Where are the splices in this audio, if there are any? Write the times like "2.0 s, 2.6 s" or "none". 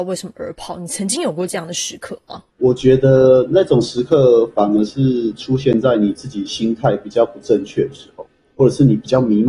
2.5 s